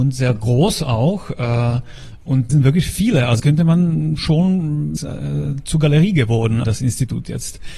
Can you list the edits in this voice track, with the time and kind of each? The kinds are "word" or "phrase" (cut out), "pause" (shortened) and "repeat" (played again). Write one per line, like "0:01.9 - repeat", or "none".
0:02.5 - word
0:03.4 - word
0:05.0 - phrase
0:06.6 - word

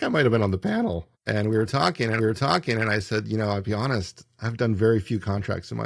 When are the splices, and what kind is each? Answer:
0:01.1 - pause
0:02.2 - repeat

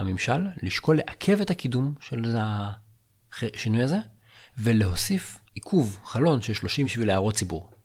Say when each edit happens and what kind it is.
0:05.5 - pause
0:06.8 - word

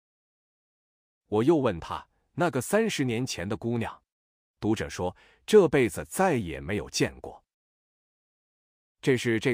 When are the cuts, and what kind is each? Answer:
none

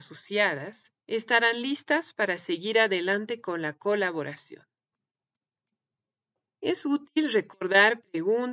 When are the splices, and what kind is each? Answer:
0:01.0 - pause

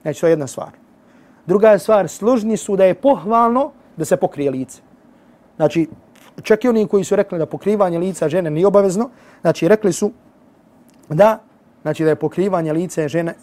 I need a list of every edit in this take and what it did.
none

